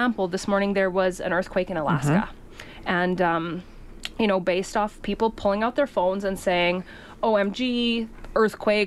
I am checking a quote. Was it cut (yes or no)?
no